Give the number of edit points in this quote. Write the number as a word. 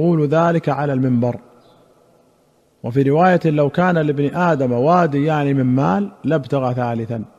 one